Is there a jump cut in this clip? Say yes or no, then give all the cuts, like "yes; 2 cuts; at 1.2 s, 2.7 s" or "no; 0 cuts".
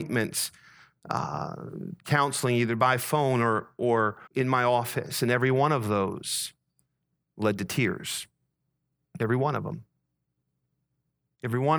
yes; 1 cut; at 4.3 s